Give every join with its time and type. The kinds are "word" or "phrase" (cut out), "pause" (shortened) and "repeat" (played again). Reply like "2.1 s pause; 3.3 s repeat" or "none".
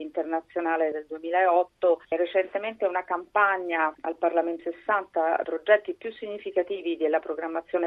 3.9 s phrase; 4.6 s phrase

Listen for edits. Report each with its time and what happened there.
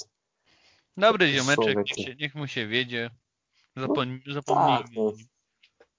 2.0 s word

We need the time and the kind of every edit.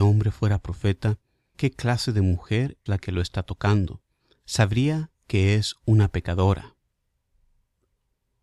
1.5 s word; 2.9 s word; 4.1 s pause

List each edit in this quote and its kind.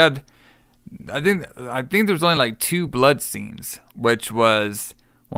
none

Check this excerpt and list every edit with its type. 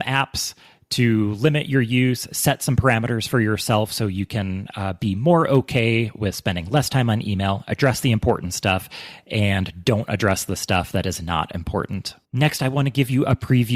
12.2 s pause

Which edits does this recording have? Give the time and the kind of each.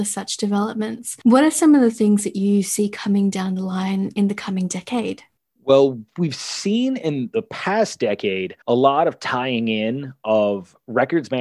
5.4 s pause; 8.6 s pause

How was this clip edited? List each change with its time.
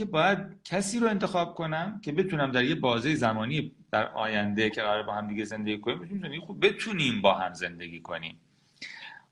none

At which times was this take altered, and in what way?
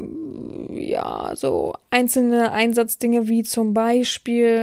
1.8 s pause

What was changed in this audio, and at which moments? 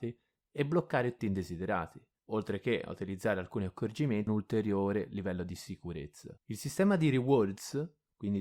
1.2 s phrase; 4.3 s phrase; 6.4 s pause

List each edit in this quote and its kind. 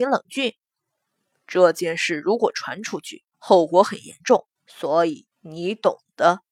3.3 s pause; 4.6 s pause; 5.3 s pause

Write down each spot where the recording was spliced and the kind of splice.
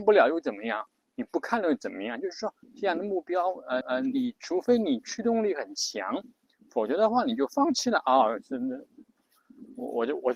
2.6 s pause; 3.8 s repeat

